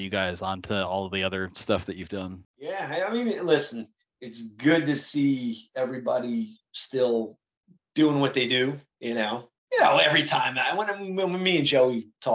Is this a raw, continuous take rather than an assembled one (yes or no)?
yes